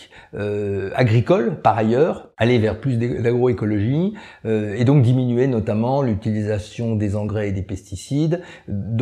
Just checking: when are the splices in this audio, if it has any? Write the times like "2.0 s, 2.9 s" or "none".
none